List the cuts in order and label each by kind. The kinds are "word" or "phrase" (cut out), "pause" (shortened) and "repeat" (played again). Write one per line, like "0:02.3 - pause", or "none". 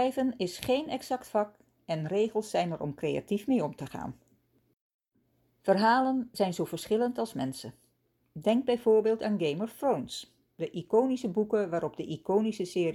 none